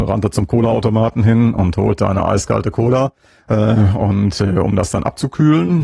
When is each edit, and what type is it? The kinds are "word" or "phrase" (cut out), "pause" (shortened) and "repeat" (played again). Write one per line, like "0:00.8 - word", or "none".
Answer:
0:03.3 - pause